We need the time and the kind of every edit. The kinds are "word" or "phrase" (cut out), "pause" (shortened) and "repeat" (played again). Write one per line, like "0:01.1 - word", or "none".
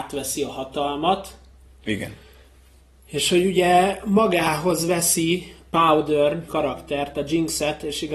0:05.7 - word
0:06.5 - word